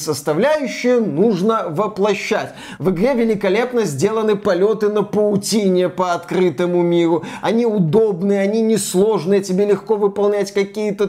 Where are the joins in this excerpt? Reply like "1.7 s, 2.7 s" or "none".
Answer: none